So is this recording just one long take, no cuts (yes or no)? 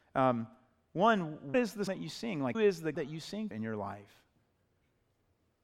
no